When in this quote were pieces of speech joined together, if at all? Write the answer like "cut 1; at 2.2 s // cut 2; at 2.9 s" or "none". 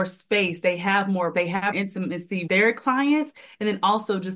cut 1; at 1.3 s // cut 2; at 1.7 s // cut 3; at 2.5 s

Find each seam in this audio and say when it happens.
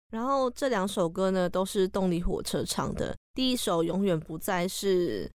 cut 1; at 3.2 s

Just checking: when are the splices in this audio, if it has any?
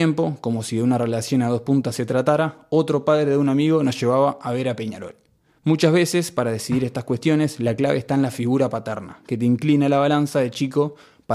none

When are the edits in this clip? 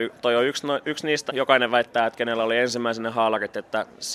cut 1; at 1.3 s

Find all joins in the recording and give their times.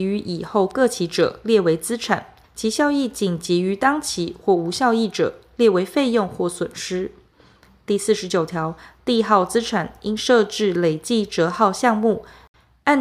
cut 1; at 2.4 s

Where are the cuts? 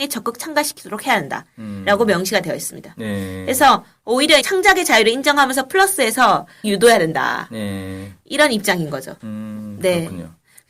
cut 1; at 4.4 s // cut 2; at 6.6 s

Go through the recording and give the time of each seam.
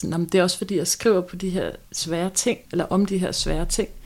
cut 1; at 1.9 s // cut 2; at 2.7 s

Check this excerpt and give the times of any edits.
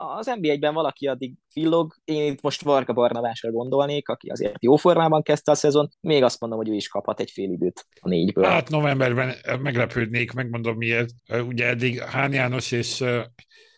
cut 1; at 2.0 s // cut 2; at 5.9 s // cut 3; at 7.9 s // cut 4; at 11.2 s

